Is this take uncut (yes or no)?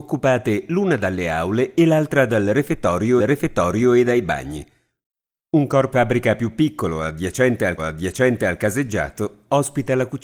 no